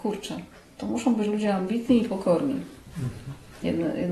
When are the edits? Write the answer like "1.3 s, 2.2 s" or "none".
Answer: none